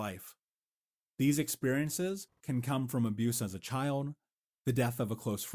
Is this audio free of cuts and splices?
yes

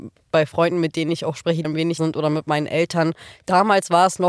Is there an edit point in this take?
yes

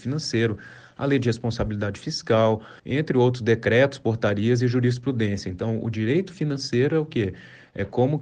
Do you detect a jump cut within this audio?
yes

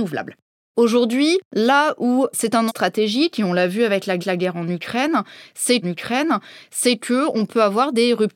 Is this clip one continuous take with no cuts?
no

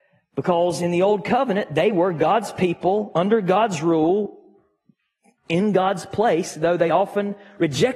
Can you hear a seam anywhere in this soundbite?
no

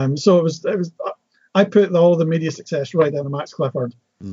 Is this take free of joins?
yes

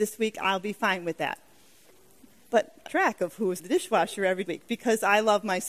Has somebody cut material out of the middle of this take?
yes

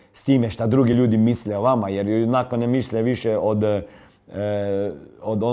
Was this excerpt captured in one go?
yes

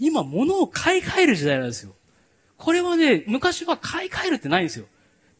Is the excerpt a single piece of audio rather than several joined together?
yes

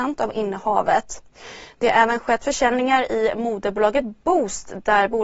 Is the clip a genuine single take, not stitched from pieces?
yes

